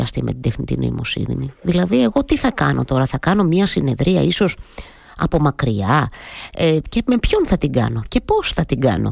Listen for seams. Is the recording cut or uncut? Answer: uncut